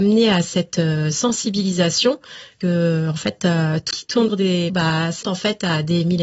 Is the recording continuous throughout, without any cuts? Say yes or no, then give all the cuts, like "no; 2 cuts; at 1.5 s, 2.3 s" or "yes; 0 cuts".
no; 5 cuts; at 2.6 s, 3.9 s, 4.3 s, 4.7 s, 5.2 s